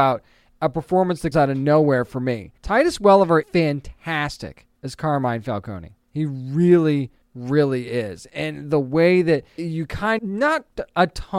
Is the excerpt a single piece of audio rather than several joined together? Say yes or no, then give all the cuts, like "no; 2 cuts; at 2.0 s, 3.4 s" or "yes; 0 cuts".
no; 8 cuts; at 1.3 s, 2.6 s, 3.4 s, 4.8 s, 6.0 s, 7.2 s, 9.6 s, 10.2 s